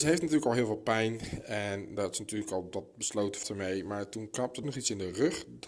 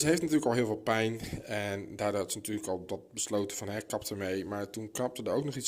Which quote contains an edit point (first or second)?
first